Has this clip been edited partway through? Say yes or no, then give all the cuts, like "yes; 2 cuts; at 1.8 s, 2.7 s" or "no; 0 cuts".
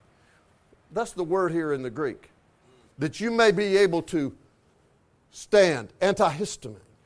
no; 0 cuts